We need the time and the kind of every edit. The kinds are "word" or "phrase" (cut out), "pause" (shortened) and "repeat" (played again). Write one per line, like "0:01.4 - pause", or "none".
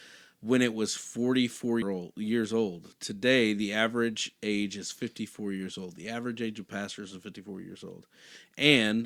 0:01.8 - word